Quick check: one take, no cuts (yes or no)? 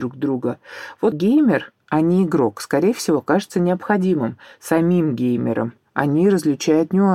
no